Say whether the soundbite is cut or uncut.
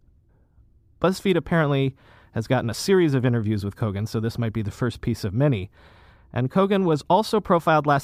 uncut